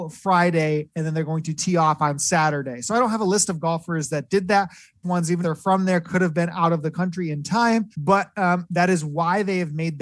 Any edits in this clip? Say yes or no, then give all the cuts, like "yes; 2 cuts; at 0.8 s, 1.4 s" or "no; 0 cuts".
yes; 3 cuts; at 5.0 s, 5.4 s, 7.9 s